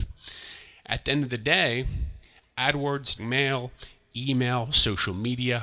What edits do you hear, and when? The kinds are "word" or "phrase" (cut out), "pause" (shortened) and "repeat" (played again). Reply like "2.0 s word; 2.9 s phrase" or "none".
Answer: 3.2 s word